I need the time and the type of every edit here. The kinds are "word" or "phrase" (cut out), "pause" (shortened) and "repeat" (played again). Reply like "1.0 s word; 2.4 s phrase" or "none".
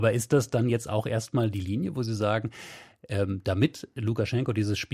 none